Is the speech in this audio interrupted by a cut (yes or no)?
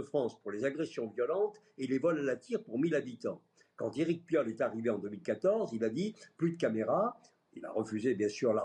no